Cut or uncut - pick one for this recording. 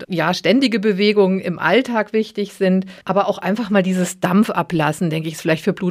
cut